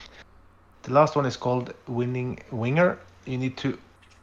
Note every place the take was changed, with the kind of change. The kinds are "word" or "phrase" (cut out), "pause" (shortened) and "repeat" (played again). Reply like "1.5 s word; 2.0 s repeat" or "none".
none